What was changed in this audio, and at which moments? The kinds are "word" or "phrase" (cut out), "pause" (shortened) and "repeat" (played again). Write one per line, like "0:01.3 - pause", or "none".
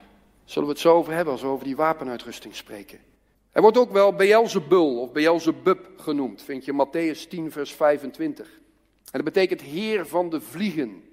none